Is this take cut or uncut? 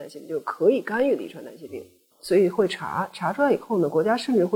uncut